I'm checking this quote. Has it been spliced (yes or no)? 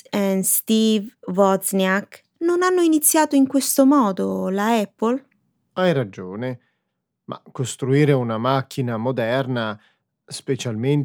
no